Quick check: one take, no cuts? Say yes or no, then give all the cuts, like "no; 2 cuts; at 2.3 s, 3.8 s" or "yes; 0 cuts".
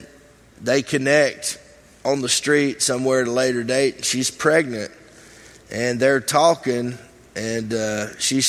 yes; 0 cuts